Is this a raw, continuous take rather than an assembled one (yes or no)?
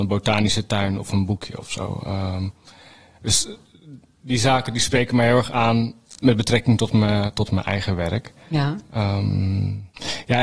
yes